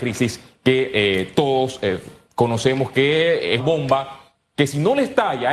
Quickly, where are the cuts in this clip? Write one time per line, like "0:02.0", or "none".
0:03.6